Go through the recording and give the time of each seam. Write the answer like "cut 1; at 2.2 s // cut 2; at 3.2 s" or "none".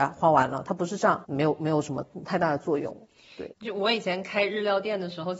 cut 1; at 1.2 s // cut 2; at 3.5 s